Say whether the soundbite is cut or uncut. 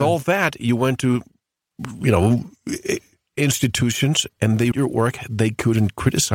cut